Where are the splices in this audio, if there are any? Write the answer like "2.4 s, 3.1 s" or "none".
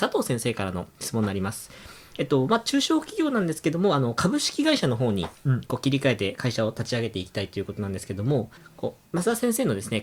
8.6 s, 9.1 s